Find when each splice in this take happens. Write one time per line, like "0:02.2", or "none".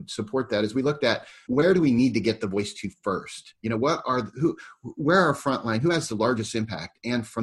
none